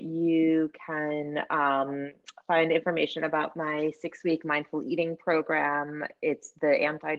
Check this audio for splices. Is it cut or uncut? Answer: uncut